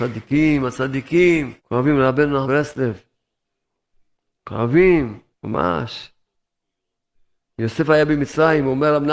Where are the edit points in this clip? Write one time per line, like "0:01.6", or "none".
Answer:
0:01.6
0:02.5
0:05.3